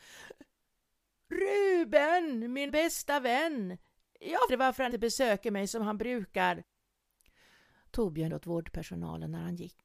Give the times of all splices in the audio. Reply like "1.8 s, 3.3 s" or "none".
2.7 s, 4.5 s, 4.9 s, 8.3 s

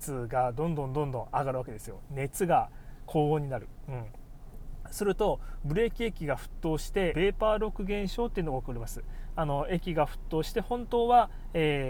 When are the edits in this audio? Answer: 7.1 s

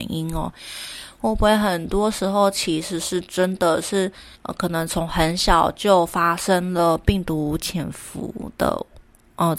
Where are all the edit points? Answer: 4.4 s

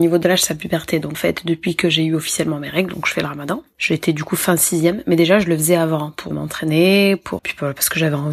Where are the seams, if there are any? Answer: 1.1 s, 6.3 s, 7.4 s

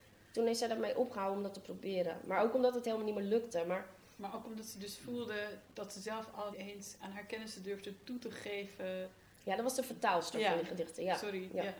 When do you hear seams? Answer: 5.6 s, 6.5 s

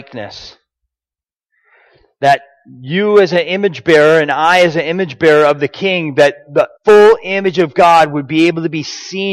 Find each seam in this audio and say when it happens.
6.8 s

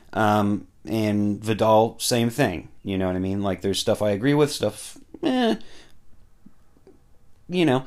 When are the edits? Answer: none

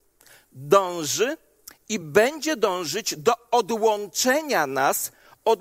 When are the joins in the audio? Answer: none

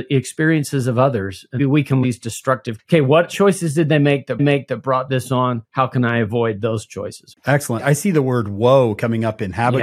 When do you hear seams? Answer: 1.6 s, 2.0 s, 2.8 s, 4.4 s, 5.6 s

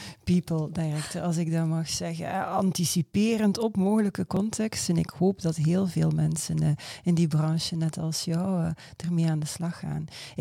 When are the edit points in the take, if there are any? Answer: none

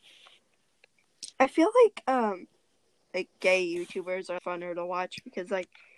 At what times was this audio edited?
1.3 s, 4.4 s

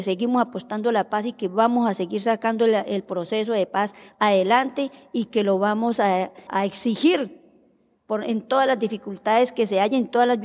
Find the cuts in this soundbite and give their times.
6.5 s

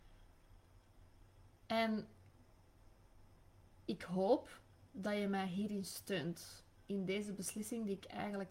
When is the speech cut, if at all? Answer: none

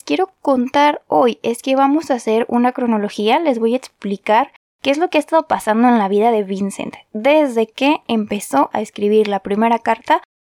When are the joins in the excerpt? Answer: none

